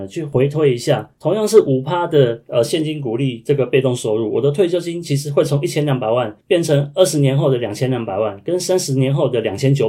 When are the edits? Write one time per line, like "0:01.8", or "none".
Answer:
0:06.4